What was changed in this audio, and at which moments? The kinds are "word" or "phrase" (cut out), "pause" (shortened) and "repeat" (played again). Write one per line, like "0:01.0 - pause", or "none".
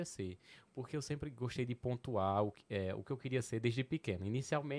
none